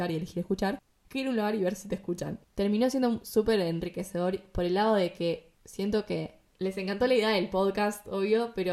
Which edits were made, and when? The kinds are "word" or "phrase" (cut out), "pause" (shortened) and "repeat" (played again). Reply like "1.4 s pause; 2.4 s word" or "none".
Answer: 5.5 s pause